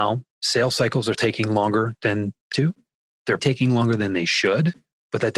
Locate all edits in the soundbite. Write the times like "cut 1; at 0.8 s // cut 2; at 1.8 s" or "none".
cut 1; at 1.1 s // cut 2; at 2.5 s // cut 3; at 3.4 s